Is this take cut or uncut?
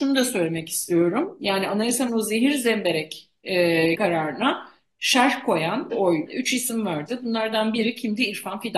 cut